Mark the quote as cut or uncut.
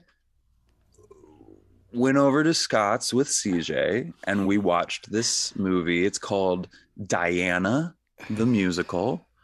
uncut